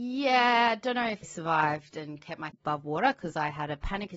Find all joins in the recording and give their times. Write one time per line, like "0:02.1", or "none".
0:01.2
0:02.5